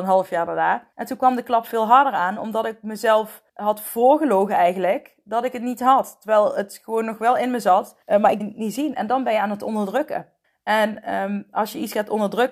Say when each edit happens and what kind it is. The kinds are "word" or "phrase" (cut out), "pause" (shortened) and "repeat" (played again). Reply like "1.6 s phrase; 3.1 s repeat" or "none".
0.9 s pause; 3.5 s pause; 8.0 s pause; 8.4 s word; 10.4 s pause